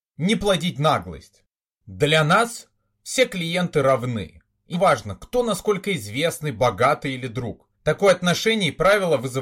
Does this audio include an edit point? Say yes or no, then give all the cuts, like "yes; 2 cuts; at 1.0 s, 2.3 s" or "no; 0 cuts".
yes; 2 cuts; at 4.7 s, 7.7 s